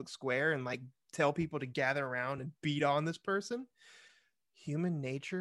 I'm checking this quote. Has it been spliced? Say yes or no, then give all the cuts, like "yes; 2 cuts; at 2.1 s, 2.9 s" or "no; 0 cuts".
no; 0 cuts